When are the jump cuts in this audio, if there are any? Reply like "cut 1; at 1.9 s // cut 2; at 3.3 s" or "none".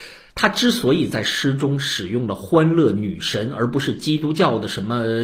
none